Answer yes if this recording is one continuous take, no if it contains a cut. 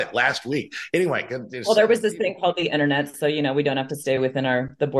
yes